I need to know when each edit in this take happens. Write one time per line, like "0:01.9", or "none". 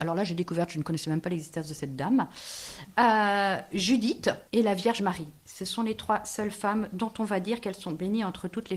0:04.5